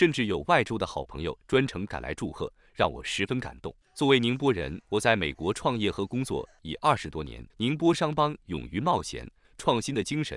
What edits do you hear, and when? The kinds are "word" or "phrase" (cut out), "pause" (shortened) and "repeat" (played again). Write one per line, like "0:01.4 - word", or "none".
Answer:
0:03.8 - pause
0:04.8 - pause
0:07.5 - pause
0:09.4 - phrase